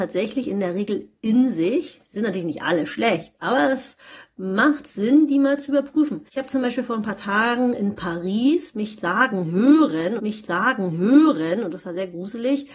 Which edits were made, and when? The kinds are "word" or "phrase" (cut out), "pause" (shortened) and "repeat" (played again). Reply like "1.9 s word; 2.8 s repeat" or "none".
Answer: 6.3 s pause; 10.2 s repeat